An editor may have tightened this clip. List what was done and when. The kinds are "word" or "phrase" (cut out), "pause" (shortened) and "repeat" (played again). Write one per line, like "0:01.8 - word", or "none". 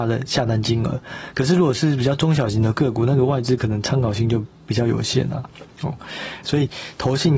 0:05.7 - pause